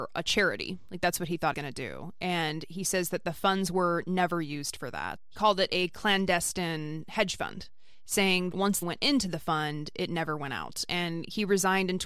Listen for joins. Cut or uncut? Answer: cut